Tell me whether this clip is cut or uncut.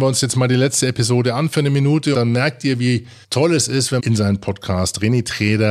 cut